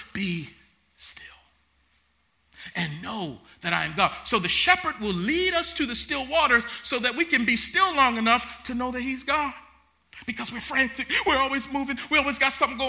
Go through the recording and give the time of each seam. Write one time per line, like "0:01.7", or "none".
none